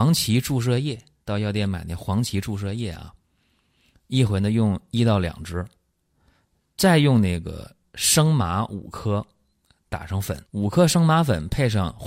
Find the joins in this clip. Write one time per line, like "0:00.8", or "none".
0:01.2
0:10.5